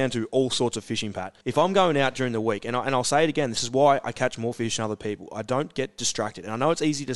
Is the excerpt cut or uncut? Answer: cut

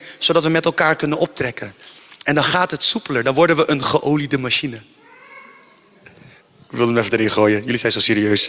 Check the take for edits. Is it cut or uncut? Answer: uncut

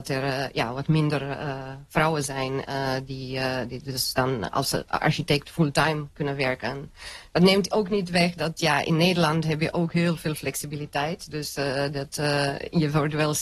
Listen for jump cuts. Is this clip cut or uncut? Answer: uncut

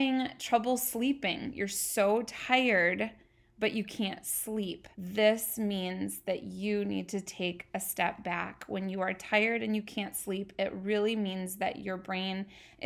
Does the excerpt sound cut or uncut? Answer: cut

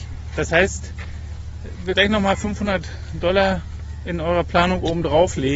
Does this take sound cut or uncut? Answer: cut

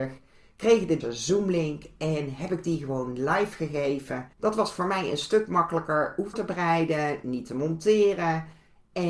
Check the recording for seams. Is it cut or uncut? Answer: cut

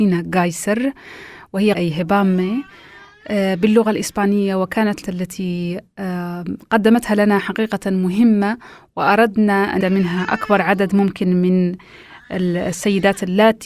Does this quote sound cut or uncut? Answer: cut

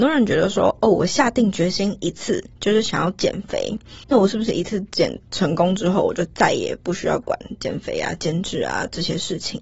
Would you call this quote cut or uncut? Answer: cut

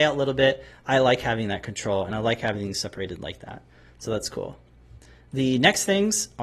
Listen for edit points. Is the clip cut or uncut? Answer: uncut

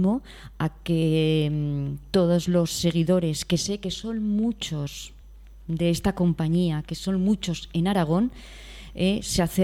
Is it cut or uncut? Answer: uncut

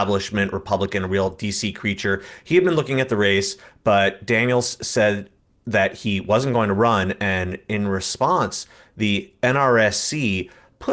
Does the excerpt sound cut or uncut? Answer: uncut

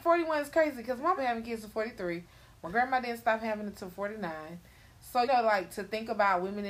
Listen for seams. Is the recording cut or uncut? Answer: cut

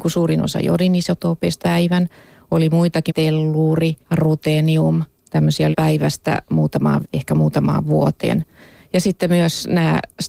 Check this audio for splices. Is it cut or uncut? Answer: cut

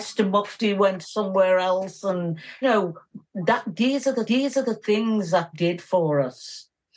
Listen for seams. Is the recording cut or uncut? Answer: cut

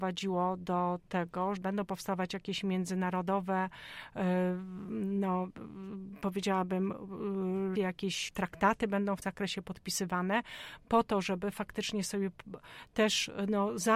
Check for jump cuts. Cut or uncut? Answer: cut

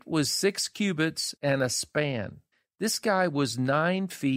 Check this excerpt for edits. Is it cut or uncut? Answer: cut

